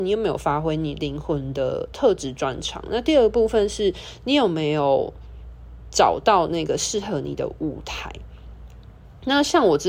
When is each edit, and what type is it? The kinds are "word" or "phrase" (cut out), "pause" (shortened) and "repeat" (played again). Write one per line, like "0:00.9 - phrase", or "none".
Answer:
none